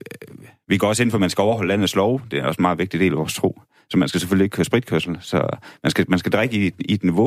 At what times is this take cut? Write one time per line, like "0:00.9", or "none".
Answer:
none

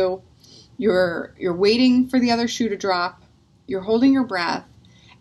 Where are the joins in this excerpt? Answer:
none

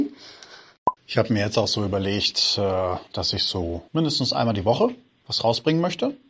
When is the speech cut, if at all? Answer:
0:01.0
0:03.1
0:03.9

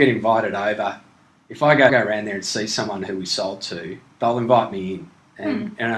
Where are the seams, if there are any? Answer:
0:01.9

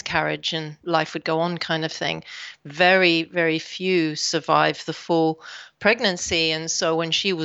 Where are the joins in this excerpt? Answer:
none

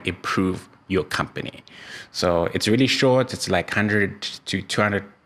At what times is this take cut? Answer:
none

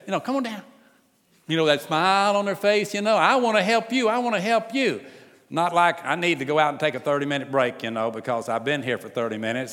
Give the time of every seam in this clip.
none

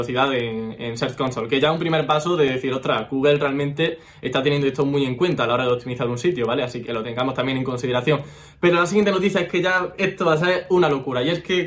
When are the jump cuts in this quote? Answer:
0:06.8

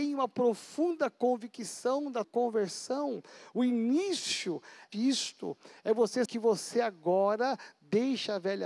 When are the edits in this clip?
0:02.2
0:04.9
0:06.3

